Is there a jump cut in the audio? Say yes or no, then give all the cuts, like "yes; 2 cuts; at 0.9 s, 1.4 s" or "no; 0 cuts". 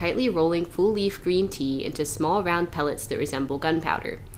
no; 0 cuts